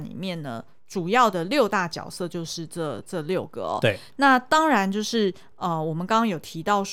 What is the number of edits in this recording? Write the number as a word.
zero